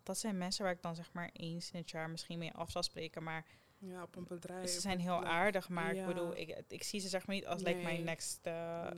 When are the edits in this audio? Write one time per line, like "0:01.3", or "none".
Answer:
none